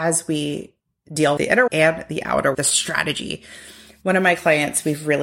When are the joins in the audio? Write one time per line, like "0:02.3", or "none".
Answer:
0:01.4
0:01.7
0:02.5